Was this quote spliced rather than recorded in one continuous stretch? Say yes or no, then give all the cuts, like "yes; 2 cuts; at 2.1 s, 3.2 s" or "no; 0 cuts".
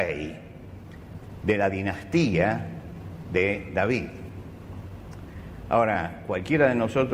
no; 0 cuts